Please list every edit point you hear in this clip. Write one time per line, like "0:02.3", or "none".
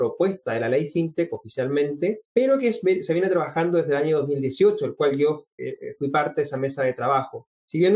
0:02.2